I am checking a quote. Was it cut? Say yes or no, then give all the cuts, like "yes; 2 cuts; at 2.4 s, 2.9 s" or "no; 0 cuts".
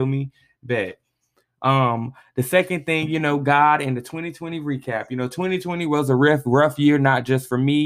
no; 0 cuts